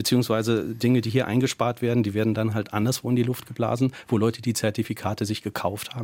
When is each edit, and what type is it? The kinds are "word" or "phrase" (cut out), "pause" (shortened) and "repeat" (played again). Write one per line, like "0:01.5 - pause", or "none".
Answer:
none

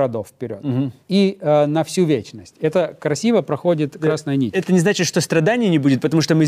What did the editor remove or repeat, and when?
0:01.0 - pause

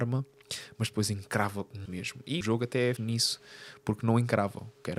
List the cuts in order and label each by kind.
0:01.9 - word
0:02.4 - word
0:03.0 - word

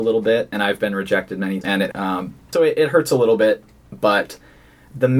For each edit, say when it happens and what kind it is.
0:01.6 - word
0:01.9 - word
0:02.5 - word

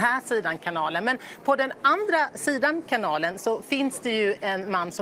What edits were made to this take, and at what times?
none

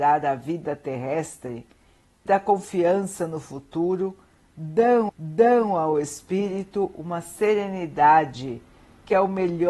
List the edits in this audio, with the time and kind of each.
0:02.3 - word
0:05.1 - repeat

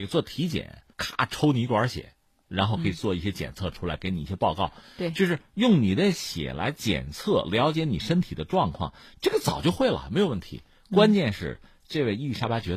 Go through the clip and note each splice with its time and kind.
0:00.9 - word

